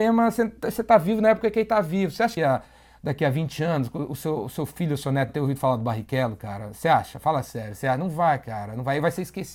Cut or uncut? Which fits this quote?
cut